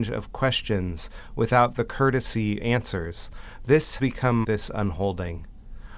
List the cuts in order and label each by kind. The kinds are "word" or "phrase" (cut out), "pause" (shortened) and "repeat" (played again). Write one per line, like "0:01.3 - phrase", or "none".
0:02.6 - word
0:04.0 - word
0:04.4 - word